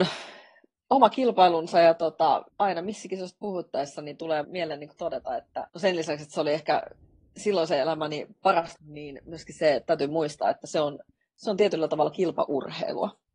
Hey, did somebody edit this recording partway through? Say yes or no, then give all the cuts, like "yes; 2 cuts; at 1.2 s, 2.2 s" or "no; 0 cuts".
yes; 4 cuts; at 2.5 s, 4.4 s, 5.7 s, 8.8 s